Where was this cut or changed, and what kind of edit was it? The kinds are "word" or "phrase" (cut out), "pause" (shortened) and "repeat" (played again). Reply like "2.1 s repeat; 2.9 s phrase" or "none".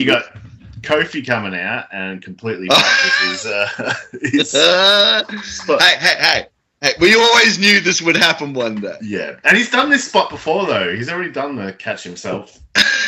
none

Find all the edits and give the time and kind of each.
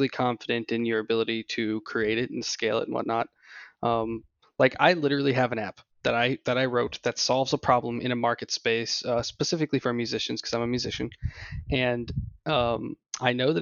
none

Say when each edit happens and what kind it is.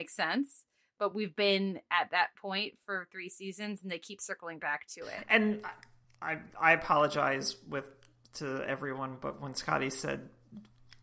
none

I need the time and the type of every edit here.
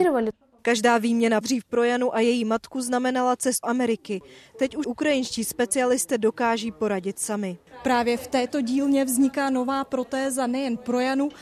1.4 s word; 3.6 s word; 4.8 s word

